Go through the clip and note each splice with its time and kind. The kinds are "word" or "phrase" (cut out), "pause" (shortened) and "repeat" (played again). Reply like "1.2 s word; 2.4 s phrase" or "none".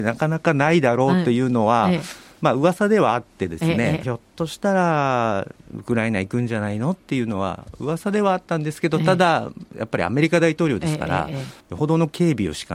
4.0 s phrase; 11.6 s pause